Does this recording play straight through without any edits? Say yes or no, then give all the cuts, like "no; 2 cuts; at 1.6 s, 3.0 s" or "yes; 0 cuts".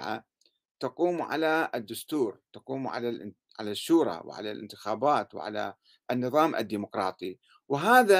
yes; 0 cuts